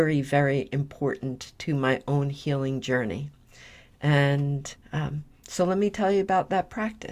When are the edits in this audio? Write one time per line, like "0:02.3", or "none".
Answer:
0:04.8